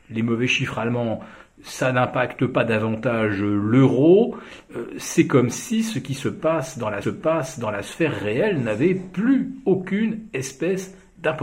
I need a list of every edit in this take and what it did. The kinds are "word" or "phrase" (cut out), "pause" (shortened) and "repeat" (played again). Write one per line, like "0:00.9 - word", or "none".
0:07.0 - repeat